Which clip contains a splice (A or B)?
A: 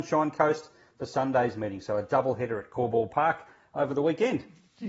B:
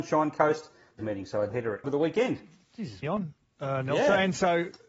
B